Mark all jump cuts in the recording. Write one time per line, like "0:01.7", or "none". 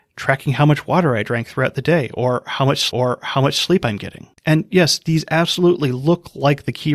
0:02.9
0:04.4